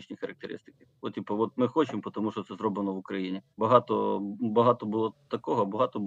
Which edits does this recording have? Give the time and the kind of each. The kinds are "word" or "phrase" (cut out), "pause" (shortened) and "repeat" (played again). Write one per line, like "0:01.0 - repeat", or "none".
0:03.5 - pause